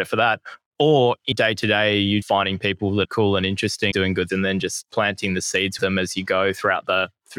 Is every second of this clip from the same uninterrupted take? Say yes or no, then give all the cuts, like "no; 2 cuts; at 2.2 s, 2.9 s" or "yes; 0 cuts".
no; 6 cuts; at 1.3 s, 2.2 s, 3.0 s, 3.9 s, 4.3 s, 5.8 s